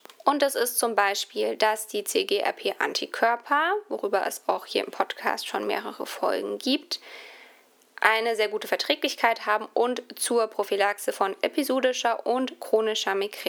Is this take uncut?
yes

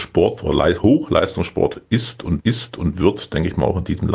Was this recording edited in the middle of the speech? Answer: yes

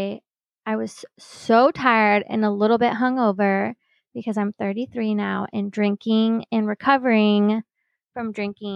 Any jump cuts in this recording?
no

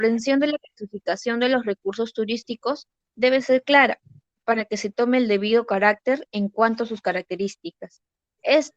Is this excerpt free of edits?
yes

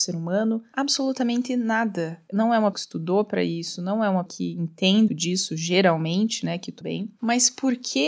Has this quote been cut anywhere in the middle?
yes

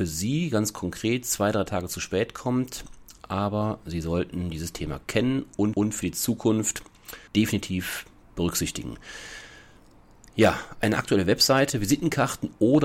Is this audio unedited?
no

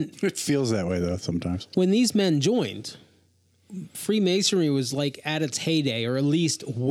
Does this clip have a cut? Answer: no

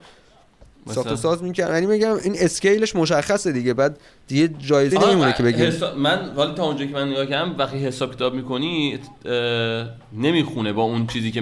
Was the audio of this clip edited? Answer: yes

